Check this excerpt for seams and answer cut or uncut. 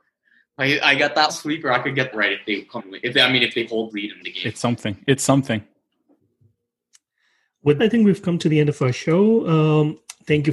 cut